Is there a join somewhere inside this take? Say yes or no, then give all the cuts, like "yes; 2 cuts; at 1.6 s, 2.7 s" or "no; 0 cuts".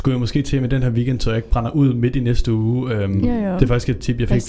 no; 0 cuts